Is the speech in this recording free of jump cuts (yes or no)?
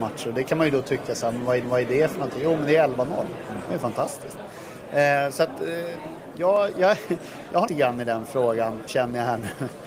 no